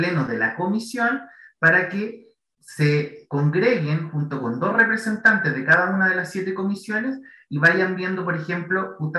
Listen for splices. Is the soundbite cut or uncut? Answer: uncut